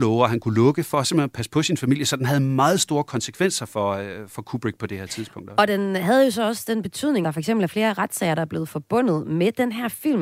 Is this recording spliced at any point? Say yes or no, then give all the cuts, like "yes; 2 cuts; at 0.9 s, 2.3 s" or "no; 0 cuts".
yes; 1 cut; at 7.2 s